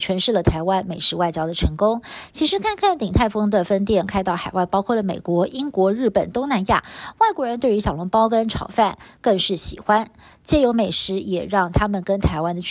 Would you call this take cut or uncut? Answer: uncut